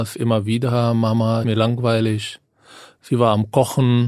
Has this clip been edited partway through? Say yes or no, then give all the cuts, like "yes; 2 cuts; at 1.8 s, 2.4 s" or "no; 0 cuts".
yes; 1 cut; at 1.4 s